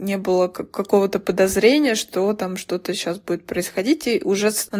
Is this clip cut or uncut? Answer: uncut